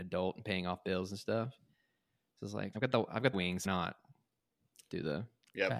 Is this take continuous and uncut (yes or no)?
no